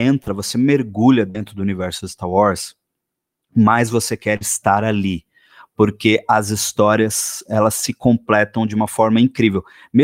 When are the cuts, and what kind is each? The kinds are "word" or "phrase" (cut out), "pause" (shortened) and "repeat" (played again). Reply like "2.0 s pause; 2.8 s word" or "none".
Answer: none